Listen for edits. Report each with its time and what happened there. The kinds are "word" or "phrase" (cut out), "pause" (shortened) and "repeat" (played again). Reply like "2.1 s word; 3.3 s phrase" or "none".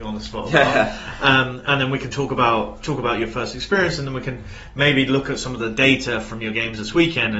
none